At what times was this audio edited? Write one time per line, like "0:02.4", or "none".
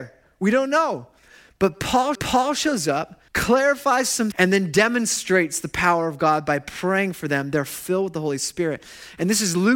0:02.1
0:03.3
0:04.3